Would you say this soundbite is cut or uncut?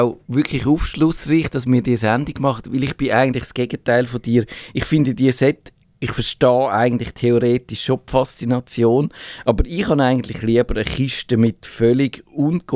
uncut